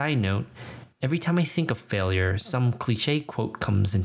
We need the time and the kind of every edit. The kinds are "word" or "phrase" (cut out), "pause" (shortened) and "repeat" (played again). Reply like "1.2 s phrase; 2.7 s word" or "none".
none